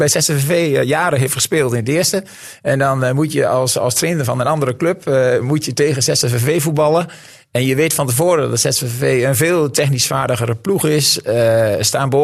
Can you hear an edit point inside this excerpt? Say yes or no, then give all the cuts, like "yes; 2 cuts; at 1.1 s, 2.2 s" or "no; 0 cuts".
no; 0 cuts